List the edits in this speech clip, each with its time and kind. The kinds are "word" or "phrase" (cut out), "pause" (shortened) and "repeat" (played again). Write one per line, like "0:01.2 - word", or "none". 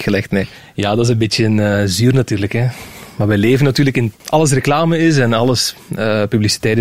0:04.1 - phrase